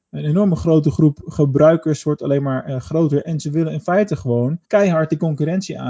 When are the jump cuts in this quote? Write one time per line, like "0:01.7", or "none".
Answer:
0:04.6